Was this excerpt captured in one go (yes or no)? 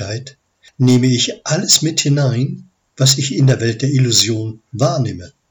yes